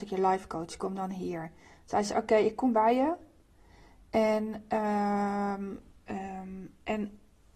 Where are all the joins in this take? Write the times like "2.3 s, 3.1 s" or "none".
5.9 s